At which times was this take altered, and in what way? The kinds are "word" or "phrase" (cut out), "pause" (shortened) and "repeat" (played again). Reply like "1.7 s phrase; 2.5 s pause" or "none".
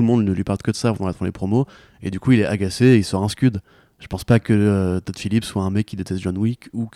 none